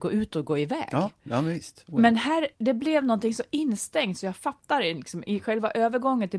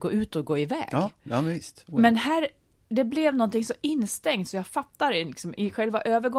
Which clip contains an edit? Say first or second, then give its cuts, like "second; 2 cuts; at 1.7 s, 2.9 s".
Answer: first; 1 cut; at 2.5 s